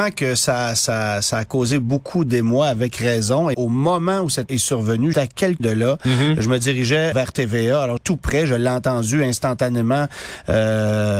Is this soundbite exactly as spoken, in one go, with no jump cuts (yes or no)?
no